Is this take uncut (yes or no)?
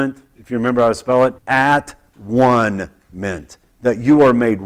no